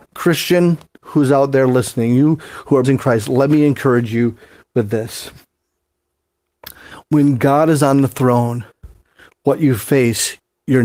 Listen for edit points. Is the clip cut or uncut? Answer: cut